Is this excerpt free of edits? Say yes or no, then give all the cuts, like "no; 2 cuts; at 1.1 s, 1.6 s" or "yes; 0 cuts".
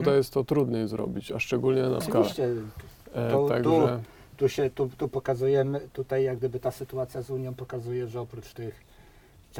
no; 1 cut; at 2.0 s